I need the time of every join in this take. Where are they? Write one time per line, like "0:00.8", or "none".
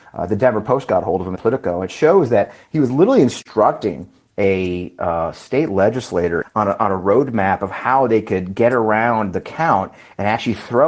0:01.4
0:06.4

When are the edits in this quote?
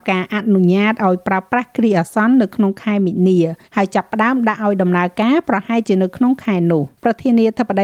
0:03.6
0:06.9

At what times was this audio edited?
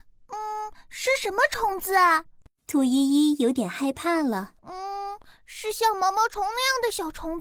0:02.4
0:04.6

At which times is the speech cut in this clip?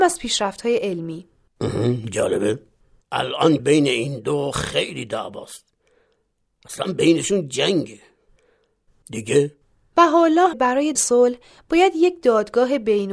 0:03.6
0:10.5
0:10.9

